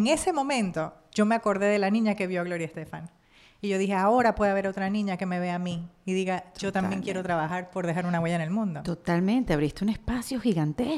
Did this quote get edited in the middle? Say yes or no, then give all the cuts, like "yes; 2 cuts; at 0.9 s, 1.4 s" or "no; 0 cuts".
no; 0 cuts